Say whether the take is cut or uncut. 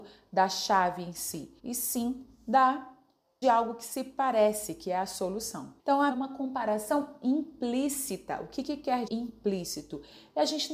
cut